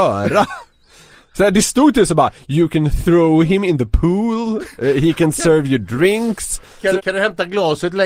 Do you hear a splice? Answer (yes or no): yes